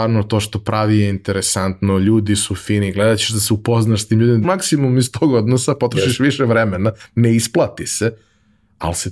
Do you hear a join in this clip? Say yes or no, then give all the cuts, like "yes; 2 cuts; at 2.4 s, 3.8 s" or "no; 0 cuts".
yes; 1 cut; at 4.4 s